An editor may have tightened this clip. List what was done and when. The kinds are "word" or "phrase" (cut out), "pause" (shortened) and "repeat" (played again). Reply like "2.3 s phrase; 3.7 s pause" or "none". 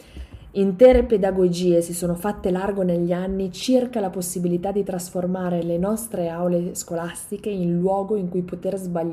none